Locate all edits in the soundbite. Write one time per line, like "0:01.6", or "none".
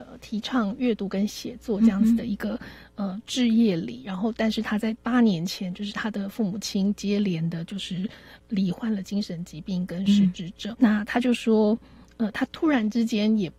0:10.7